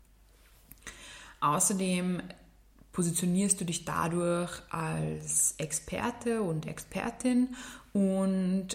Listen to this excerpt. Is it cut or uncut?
uncut